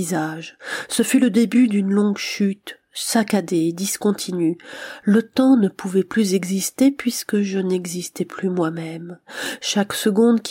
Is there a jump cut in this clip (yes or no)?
no